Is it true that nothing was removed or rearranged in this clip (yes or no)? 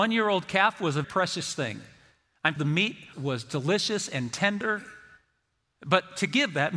no